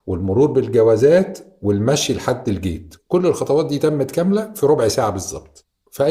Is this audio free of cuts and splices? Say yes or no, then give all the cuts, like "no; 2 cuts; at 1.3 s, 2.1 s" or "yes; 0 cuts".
yes; 0 cuts